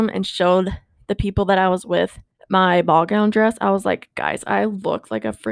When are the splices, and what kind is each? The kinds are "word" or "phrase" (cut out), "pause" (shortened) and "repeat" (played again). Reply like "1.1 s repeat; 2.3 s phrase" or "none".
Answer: 2.3 s pause

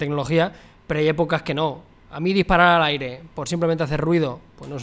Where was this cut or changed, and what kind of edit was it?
none

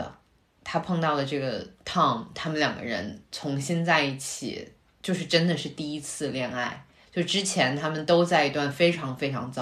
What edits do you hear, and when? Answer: none

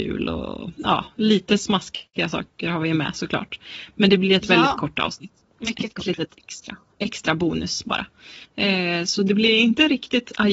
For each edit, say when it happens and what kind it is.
5.5 s pause; 8.4 s pause

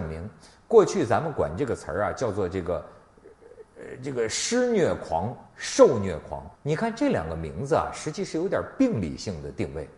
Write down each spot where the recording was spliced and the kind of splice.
5.5 s pause; 6.5 s pause

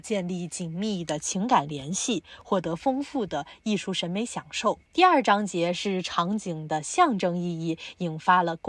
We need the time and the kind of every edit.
4.9 s pause

